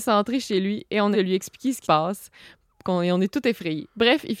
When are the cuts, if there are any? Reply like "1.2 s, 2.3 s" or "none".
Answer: 1.1 s, 1.8 s